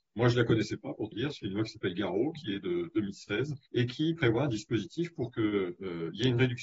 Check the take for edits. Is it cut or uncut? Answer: cut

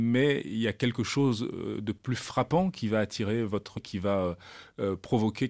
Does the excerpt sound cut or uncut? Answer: cut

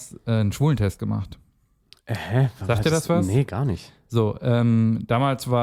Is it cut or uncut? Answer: uncut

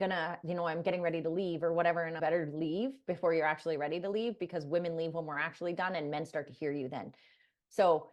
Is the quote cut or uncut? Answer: cut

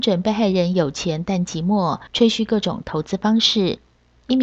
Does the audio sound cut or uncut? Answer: cut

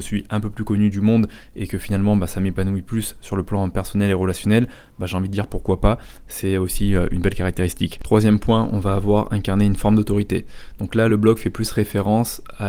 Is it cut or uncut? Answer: uncut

